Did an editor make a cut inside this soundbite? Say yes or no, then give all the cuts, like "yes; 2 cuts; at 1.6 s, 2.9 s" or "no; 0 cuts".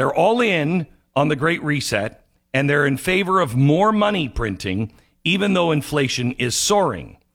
no; 0 cuts